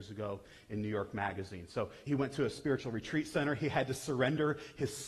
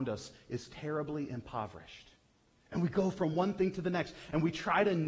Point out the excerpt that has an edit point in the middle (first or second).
first